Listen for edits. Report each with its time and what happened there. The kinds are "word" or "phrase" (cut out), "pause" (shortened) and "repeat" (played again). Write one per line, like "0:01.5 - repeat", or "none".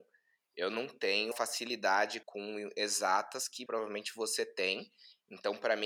0:01.3 - word
0:02.2 - word
0:03.7 - word